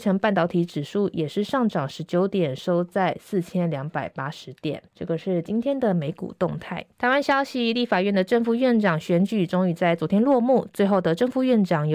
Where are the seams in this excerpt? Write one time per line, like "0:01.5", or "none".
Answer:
0:04.9
0:06.9